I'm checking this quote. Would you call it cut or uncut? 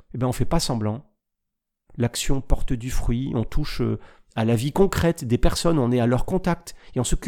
uncut